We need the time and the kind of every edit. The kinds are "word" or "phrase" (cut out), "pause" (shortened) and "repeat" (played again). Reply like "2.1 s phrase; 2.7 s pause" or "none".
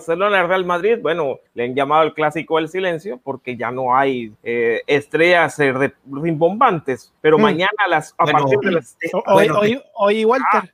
1.5 s pause; 4.4 s pause; 7.2 s pause

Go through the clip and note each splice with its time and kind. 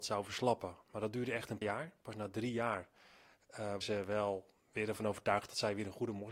1.6 s word; 3.8 s word

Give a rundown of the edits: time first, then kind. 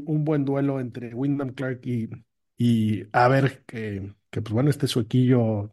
none

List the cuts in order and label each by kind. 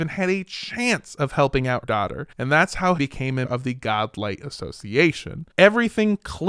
1.8 s word; 2.3 s pause; 3.0 s word; 3.4 s word; 5.5 s pause

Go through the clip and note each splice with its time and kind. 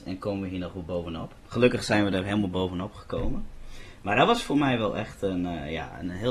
1.4 s pause

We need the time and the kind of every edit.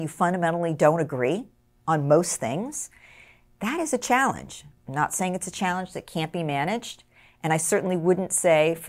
none

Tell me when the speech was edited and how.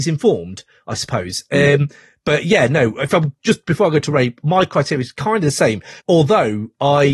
6.0 s pause

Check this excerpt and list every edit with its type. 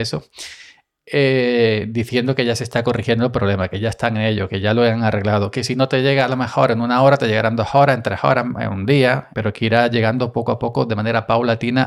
9.3 s word

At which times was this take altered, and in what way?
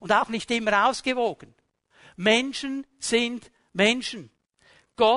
none

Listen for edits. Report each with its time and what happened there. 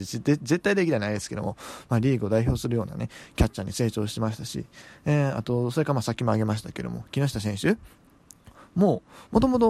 none

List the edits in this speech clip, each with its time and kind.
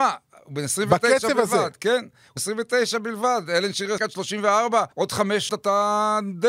2.4 s word; 4.0 s word; 4.9 s pause; 5.5 s word

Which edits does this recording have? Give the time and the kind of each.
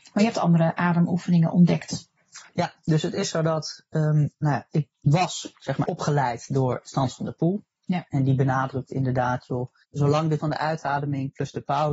2.5 s pause; 4.9 s pause; 5.8 s word; 9.8 s pause; 10.4 s word

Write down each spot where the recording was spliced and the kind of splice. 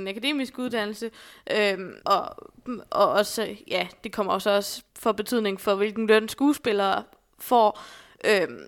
2.0 s pause; 4.9 s pause

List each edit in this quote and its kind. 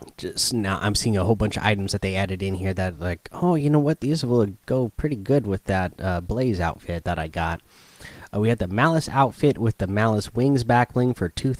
none

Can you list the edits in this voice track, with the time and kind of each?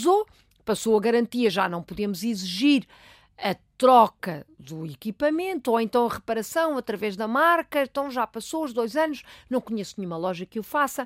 none

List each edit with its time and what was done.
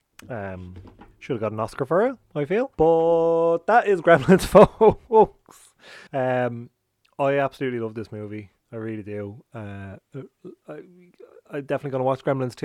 1.1 s pause; 2.7 s pause; 6.1 s pause

